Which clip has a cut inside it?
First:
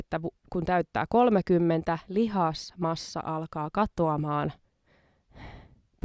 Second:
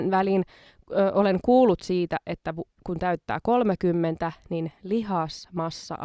first; 1 cut; at 2.0 s

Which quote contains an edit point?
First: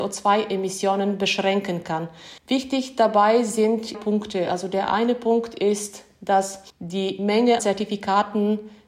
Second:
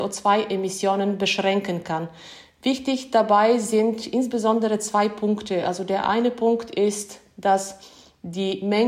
first; 4 cuts; at 2.4 s, 3.9 s, 6.7 s, 7.6 s

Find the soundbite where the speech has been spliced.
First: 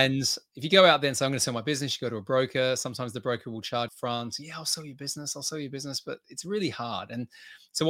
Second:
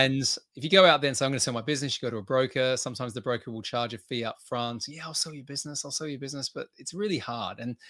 first; 1 cut; at 3.9 s

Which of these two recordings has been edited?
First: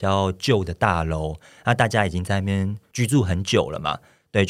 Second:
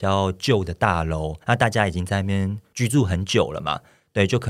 second; 1 cut; at 1.4 s

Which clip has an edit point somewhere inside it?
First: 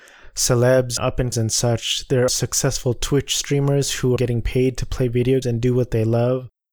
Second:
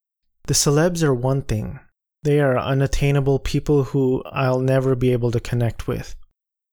first; 5 cuts; at 1.0 s, 1.3 s, 2.3 s, 4.2 s, 5.4 s

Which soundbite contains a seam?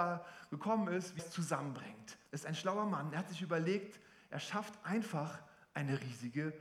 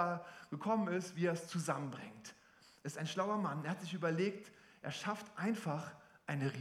first; 2 cuts; at 1.2 s, 2.3 s

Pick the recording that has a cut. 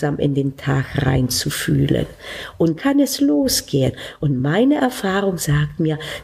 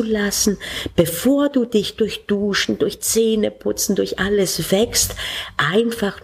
first; 1 cut; at 2.8 s

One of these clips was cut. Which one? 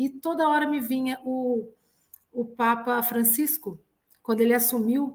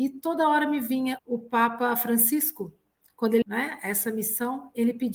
second; 2 cuts; at 1.2 s, 3.4 s

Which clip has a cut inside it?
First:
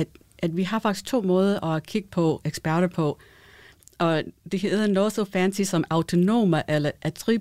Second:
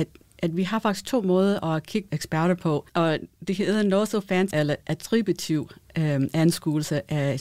second; 3 cuts; at 2.1 s, 2.9 s, 4.5 s

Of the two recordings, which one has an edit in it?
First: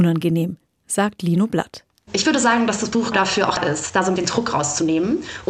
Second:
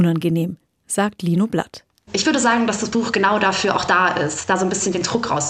first; 3 cuts; at 3.1 s, 3.6 s, 4.2 s

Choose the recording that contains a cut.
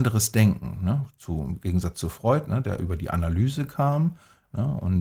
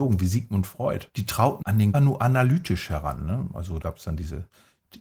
second; 4 cuts; at 1.1 s, 1.6 s, 1.9 s, 3.8 s

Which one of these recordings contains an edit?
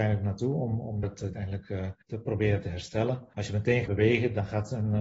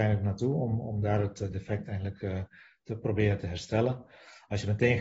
first; 5 cuts; at 1.0 s, 1.3 s, 2.0 s, 3.3 s, 3.9 s

